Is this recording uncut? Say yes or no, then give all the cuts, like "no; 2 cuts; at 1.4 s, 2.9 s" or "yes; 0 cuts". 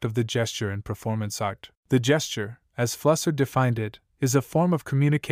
no; 1 cut; at 1.8 s